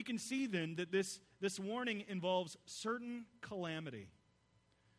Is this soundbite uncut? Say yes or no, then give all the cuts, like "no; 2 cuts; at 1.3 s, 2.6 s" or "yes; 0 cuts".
yes; 0 cuts